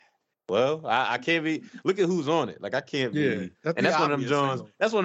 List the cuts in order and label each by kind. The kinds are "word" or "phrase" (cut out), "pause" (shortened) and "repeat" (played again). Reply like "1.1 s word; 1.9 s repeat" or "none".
3.5 s pause